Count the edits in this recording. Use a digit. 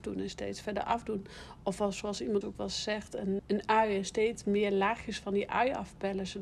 2